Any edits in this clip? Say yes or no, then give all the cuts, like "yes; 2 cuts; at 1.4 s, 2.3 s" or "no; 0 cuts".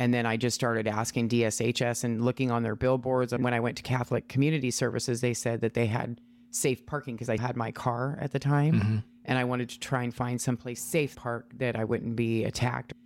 yes; 3 cuts; at 3.4 s, 7.4 s, 11.1 s